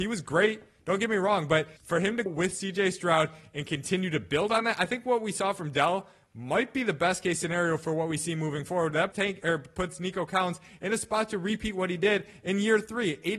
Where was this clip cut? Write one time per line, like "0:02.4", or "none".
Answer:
0:01.8
0:02.3
0:09.1